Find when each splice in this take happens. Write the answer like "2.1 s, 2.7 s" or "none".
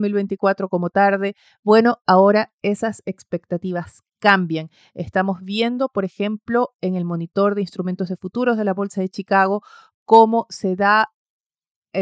none